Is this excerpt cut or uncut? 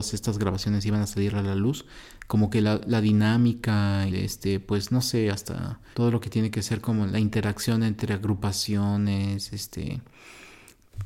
cut